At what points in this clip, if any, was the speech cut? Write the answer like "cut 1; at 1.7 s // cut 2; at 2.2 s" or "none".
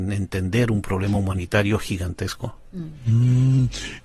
none